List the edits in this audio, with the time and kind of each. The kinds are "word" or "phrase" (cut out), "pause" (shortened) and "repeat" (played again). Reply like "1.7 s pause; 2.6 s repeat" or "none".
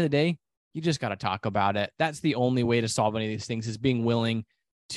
none